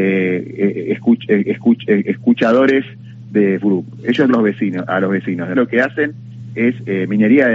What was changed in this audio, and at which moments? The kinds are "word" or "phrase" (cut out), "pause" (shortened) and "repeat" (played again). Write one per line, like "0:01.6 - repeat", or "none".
0:01.4 - repeat
0:03.6 - word
0:04.3 - phrase
0:05.5 - word